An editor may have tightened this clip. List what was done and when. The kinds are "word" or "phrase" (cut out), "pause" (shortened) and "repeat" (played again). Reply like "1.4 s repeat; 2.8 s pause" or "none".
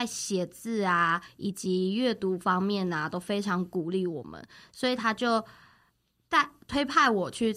none